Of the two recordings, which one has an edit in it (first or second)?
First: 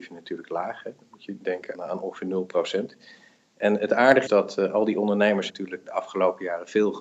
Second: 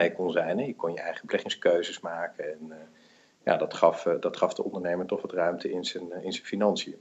first